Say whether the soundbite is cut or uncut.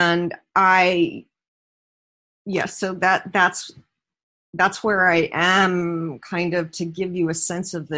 uncut